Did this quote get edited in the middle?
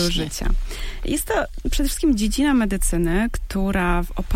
no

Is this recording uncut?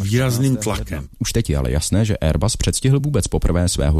yes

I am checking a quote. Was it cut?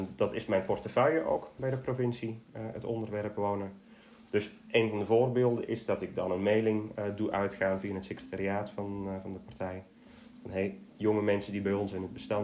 no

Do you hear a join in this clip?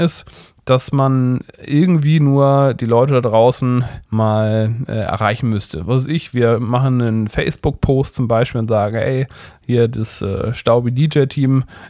yes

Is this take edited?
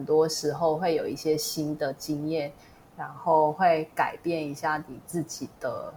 no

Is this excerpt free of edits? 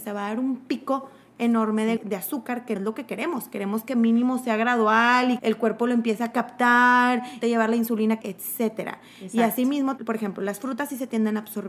no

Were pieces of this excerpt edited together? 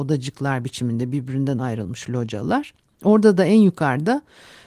no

